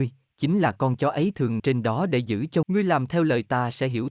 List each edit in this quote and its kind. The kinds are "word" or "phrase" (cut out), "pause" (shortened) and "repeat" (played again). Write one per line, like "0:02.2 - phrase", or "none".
0:01.6 - word
0:02.6 - word